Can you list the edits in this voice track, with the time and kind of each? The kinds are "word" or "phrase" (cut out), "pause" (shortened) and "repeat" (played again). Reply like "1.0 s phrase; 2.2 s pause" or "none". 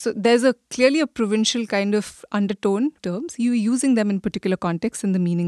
3.0 s phrase